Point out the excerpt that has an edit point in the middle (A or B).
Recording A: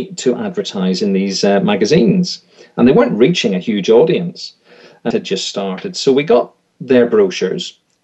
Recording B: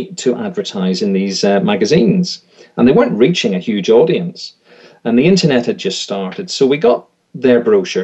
A